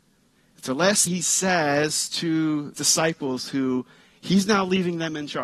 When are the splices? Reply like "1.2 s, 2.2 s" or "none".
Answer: 1.1 s, 2.7 s

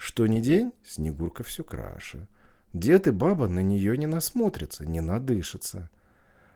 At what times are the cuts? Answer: none

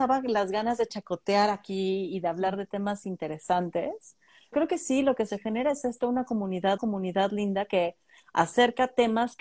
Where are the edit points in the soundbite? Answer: 4.5 s, 6.8 s

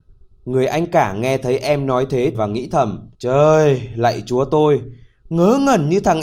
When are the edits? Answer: 2.3 s, 3.1 s

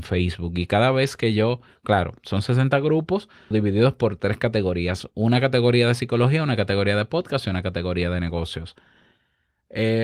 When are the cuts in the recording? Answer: 3.5 s

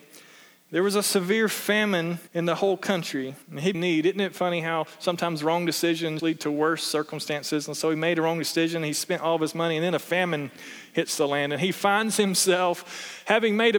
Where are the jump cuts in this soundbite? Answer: 2.3 s, 3.4 s, 3.7 s, 6.2 s

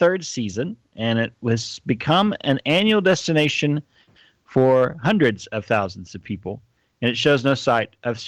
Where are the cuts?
none

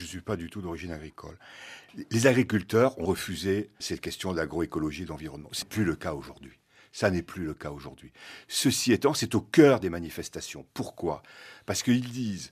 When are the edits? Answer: 3.0 s, 3.8 s, 5.6 s

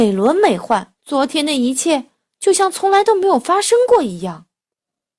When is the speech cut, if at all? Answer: 1.0 s

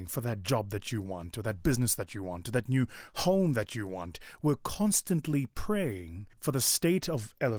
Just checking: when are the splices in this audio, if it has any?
6.3 s

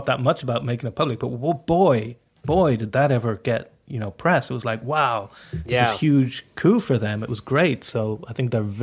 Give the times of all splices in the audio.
none

